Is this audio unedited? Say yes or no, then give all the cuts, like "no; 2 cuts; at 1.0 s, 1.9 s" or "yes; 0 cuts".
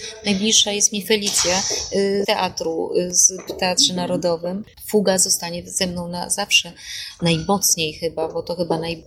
no; 2 cuts; at 2.2 s, 3.5 s